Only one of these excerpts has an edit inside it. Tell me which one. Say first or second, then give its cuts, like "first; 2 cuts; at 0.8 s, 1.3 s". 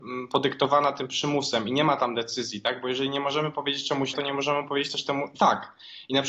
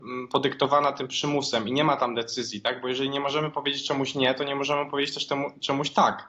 first; 2 cuts; at 4.1 s, 5.4 s